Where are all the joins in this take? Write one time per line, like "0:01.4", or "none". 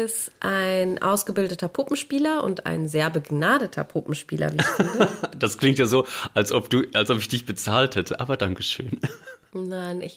none